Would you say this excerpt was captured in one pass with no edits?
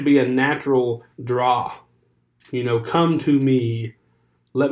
no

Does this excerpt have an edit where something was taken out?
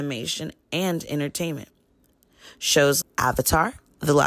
yes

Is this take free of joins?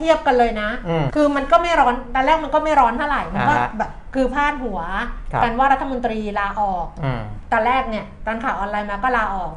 no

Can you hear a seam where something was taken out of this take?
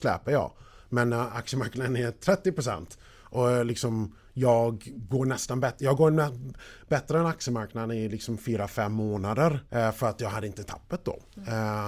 yes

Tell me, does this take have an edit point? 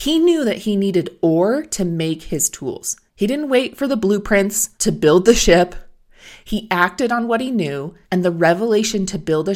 yes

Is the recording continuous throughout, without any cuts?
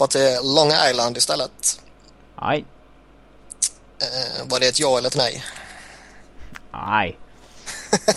yes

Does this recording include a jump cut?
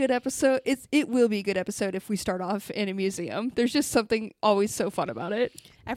no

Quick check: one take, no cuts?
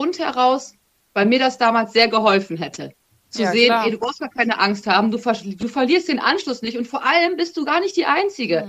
yes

